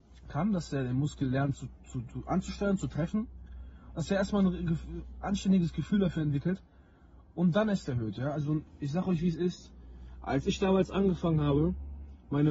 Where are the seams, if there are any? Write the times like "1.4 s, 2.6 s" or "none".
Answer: none